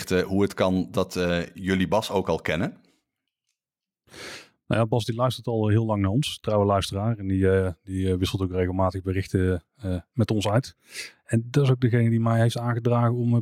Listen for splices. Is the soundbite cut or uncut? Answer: uncut